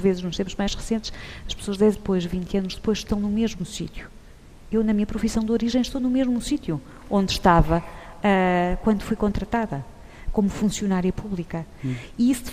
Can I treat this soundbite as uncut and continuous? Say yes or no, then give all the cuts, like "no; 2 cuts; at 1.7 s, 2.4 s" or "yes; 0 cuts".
no; 1 cut; at 1.9 s